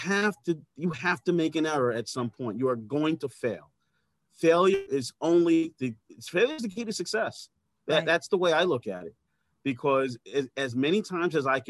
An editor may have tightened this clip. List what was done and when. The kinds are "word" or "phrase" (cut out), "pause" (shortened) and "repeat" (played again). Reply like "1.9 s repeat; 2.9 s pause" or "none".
none